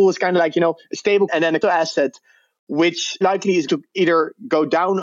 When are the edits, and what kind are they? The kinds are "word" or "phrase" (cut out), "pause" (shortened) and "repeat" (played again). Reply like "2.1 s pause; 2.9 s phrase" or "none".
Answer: 1.3 s word; 1.6 s word; 3.2 s word; 3.7 s word

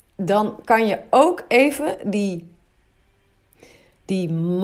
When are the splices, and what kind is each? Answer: none

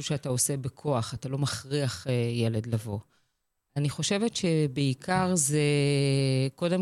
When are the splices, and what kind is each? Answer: none

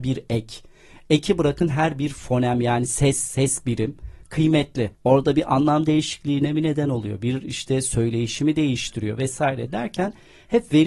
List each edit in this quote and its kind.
4.9 s pause

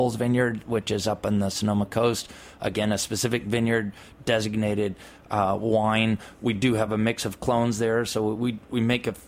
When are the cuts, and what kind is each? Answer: none

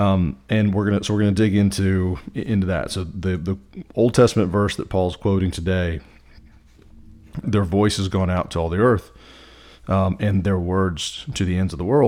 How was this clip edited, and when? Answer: 7.4 s word

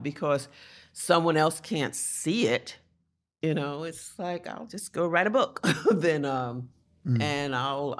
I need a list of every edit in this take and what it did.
none

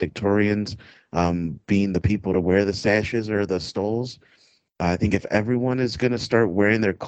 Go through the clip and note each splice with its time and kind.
none

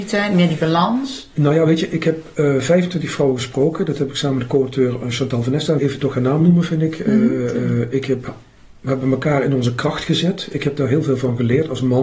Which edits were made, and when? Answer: 5.8 s word

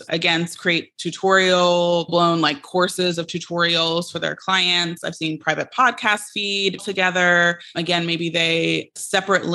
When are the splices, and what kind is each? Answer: 2.1 s word; 6.8 s phrase

